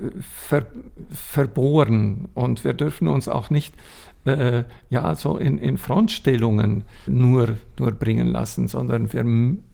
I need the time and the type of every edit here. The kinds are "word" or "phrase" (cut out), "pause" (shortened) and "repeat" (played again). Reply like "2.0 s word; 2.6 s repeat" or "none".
7.1 s word